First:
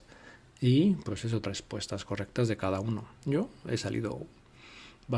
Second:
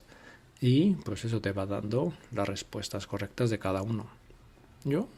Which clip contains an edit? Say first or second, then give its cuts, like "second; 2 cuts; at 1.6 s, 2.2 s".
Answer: first; 2 cuts; at 1.4 s, 3.2 s